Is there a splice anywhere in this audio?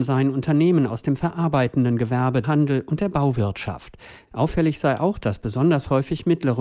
yes; 1 cut; at 2.4 s

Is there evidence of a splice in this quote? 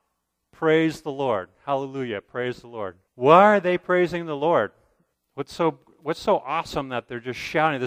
yes; 2 cuts; at 3.0 s, 5.1 s

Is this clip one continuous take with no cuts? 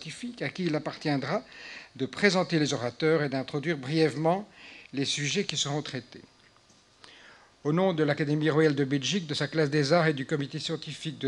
yes; 0 cuts

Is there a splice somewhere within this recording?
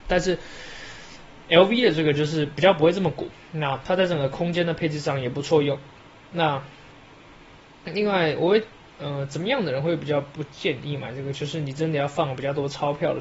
no; 0 cuts

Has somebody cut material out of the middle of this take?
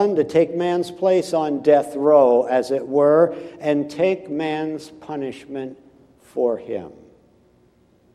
no; 0 cuts

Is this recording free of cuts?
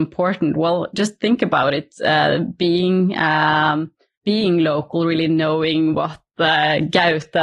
yes; 0 cuts

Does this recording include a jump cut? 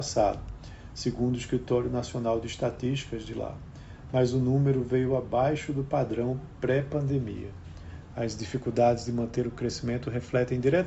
no; 0 cuts

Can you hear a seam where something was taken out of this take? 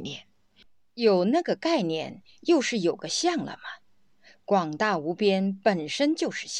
no; 0 cuts

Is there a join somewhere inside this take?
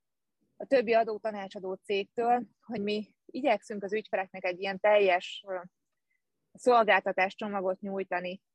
no; 0 cuts

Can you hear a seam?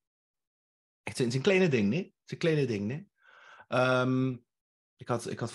no; 0 cuts

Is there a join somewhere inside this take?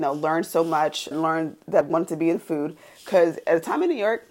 yes; 2 cuts; at 1.1 s, 1.8 s

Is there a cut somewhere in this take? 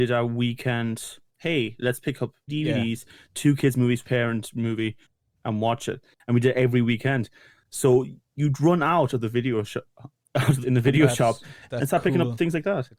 yes; 3 cuts; at 2.5 s, 4.0 s, 10.6 s

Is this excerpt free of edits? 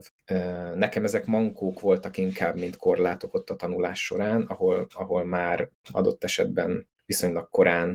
yes; 0 cuts

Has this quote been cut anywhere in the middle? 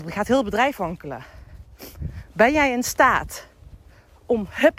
no; 0 cuts

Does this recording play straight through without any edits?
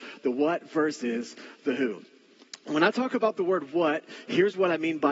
yes; 0 cuts

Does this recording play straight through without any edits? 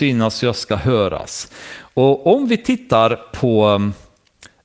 yes; 0 cuts

